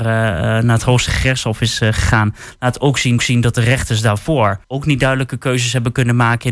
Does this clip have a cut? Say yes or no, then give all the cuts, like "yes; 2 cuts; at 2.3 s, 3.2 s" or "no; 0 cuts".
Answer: yes; 2 cuts; at 3.2 s, 4.6 s